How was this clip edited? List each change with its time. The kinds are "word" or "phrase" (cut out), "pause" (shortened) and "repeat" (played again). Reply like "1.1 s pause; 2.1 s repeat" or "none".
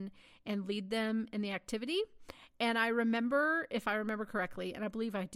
none